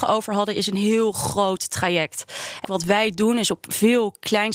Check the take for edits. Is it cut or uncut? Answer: cut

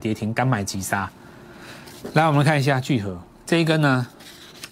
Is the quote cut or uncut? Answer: cut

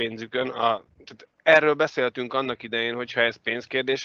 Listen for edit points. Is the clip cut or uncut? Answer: cut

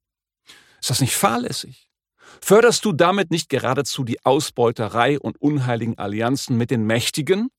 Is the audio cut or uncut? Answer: uncut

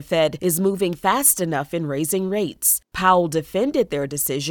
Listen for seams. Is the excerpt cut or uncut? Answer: uncut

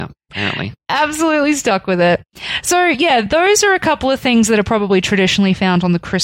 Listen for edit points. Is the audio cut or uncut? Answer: uncut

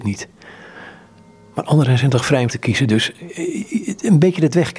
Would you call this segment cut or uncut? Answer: cut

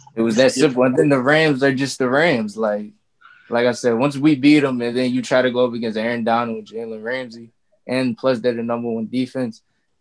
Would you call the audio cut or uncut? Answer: uncut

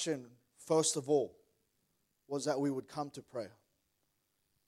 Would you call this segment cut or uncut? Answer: uncut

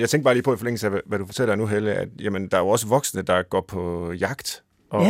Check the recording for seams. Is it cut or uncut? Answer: uncut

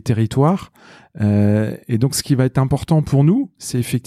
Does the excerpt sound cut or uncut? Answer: uncut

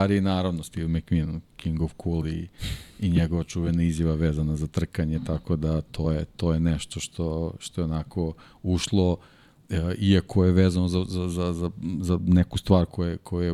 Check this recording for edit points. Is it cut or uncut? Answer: uncut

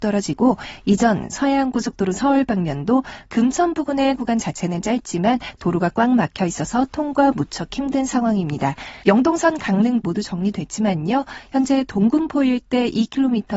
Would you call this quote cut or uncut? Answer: cut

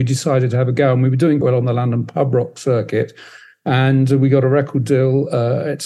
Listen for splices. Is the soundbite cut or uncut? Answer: cut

